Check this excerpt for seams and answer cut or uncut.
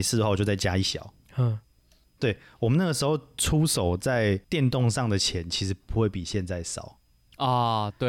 cut